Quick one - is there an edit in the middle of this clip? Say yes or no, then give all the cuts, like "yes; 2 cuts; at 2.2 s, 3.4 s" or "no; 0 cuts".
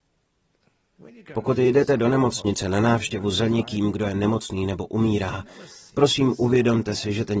no; 0 cuts